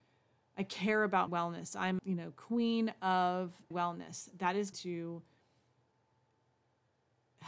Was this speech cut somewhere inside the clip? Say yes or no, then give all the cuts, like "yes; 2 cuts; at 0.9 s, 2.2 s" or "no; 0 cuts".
yes; 4 cuts; at 1.3 s, 2.0 s, 3.7 s, 4.7 s